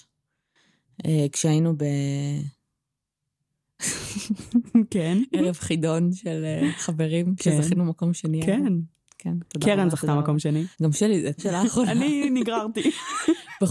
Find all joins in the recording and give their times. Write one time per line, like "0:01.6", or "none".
0:10.7
0:11.4

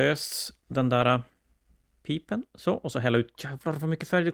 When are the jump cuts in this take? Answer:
none

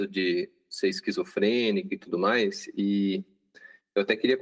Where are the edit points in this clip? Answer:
none

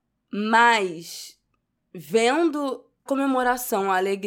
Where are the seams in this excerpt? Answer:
0:03.1

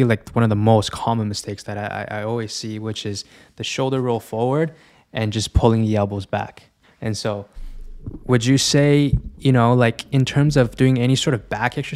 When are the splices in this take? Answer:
0:06.8

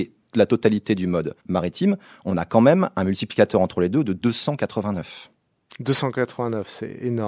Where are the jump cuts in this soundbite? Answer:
0:01.4

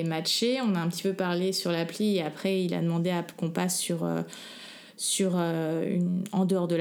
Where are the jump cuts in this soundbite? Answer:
none

